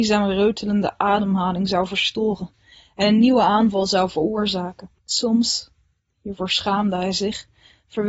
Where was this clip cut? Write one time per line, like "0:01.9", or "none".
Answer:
0:05.0